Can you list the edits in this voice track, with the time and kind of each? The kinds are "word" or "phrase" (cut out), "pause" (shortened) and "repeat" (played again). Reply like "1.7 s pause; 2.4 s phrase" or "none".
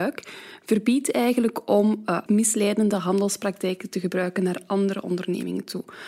2.3 s phrase

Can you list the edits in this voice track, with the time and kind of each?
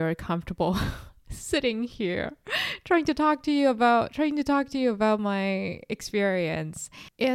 none

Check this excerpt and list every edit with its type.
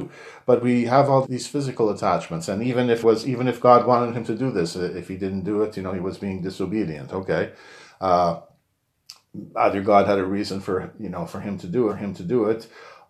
1.2 s word; 3.0 s word; 11.9 s repeat

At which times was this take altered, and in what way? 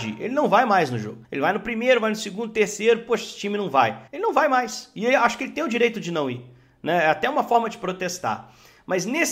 1.2 s pause; 4.1 s pause

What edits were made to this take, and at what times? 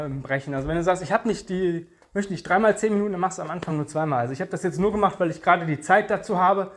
none

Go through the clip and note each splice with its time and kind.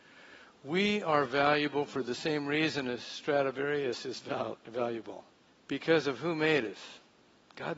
5.5 s pause

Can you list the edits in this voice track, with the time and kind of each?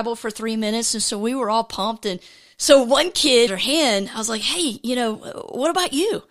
2.3 s pause; 3.5 s phrase

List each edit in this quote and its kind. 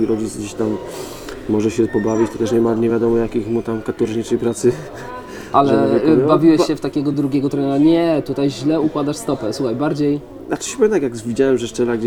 none

